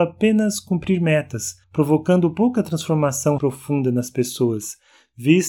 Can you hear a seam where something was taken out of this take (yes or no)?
yes